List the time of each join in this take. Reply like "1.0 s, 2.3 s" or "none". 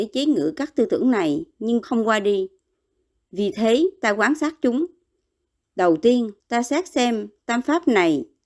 1.8 s, 6.4 s